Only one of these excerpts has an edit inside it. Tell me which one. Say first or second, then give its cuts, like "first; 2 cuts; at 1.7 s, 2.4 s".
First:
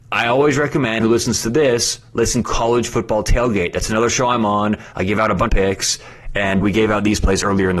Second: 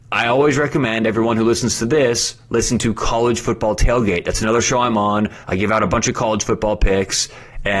first; 4 cuts; at 1.0 s, 2.4 s, 5.5 s, 6.6 s